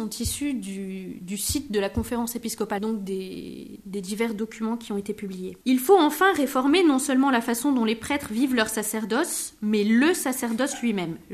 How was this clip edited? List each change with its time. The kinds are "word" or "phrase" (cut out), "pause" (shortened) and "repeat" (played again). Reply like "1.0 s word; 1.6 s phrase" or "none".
2.8 s phrase; 5.6 s pause